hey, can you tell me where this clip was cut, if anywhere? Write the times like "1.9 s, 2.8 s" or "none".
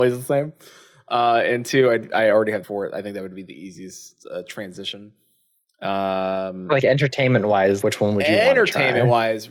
2.6 s, 7.8 s

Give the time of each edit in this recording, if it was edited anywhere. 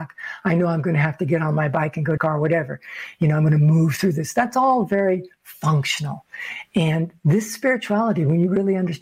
2.2 s

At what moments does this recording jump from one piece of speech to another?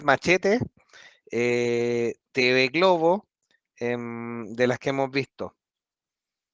none

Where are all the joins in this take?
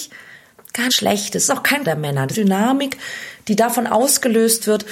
0.9 s, 1.5 s, 1.8 s, 2.3 s

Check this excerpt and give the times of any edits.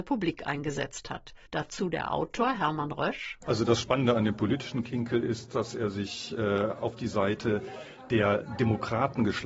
1.5 s

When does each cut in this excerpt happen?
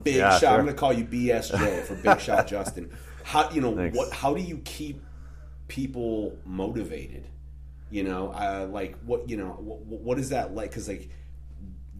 none

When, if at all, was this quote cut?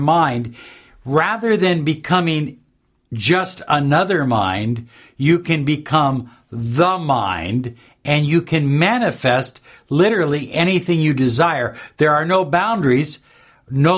none

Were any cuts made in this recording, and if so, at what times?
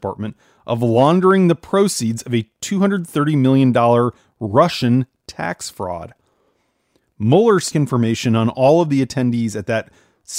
7.7 s

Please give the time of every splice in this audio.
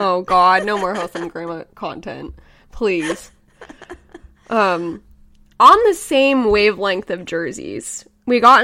none

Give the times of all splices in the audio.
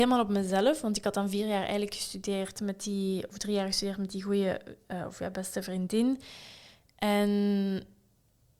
none

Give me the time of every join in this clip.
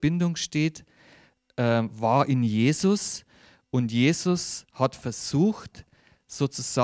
none

